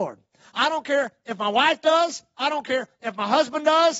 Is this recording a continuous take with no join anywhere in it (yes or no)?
yes